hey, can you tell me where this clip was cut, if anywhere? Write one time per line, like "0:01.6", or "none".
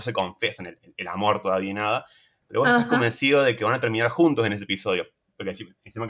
none